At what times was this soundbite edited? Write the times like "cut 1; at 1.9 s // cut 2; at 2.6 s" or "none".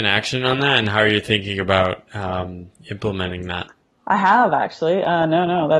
cut 1; at 3.8 s